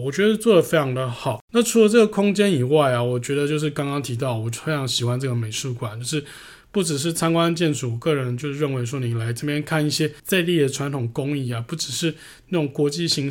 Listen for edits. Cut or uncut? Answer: cut